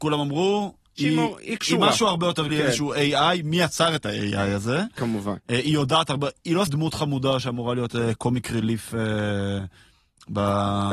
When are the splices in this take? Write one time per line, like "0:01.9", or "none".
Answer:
0:02.5
0:06.7